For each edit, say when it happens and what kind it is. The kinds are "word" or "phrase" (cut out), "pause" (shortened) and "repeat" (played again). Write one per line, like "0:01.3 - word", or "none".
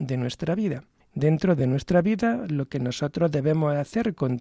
none